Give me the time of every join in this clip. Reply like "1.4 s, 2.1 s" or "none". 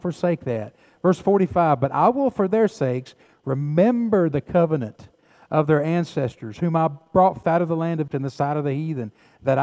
7.4 s, 8.1 s

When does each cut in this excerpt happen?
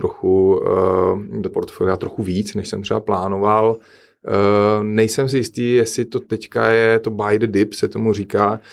1.5 s

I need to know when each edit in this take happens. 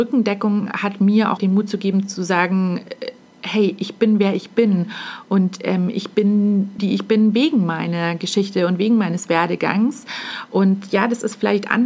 1.4 s, 6.8 s

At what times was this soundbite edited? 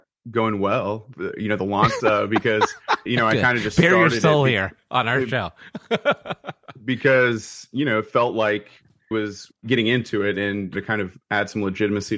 2.0 s, 3.1 s, 9.1 s, 10.7 s

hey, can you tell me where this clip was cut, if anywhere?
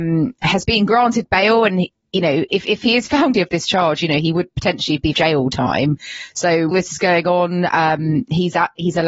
3.3 s, 4.5 s, 5.1 s, 6.7 s

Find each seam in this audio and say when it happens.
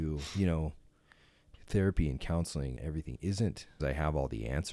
2.8 s, 3.8 s

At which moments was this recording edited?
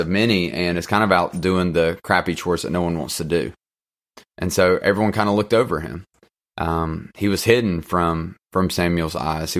none

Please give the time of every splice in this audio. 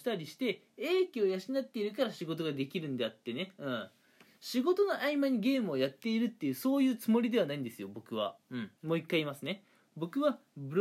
8.8 s

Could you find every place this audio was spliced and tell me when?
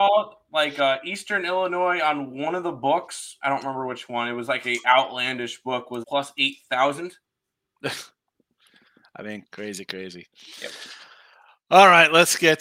6.0 s, 7.2 s, 9.4 s

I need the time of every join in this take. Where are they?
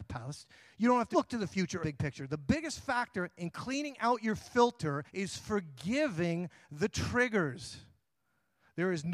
1.1 s, 1.8 s, 5.1 s

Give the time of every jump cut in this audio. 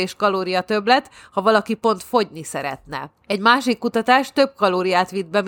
3.2 s

